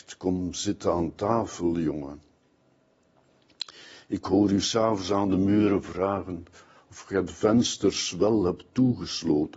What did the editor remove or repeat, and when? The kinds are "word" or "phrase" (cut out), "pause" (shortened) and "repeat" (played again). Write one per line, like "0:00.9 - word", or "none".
none